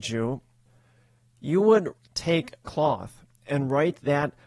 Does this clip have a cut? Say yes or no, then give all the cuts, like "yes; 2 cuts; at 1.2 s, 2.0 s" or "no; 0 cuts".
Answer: yes; 1 cut; at 2.6 s